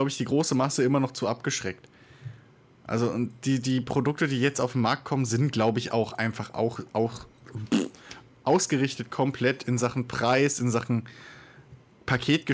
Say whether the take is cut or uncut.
uncut